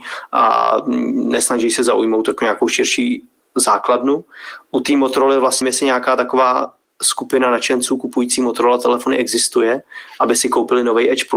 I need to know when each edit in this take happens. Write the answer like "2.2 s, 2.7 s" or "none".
5.6 s